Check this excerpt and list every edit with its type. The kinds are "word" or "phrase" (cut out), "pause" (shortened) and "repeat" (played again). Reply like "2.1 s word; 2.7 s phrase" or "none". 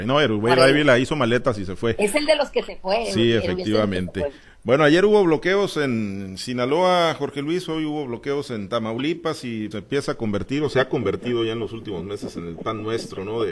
9.7 s word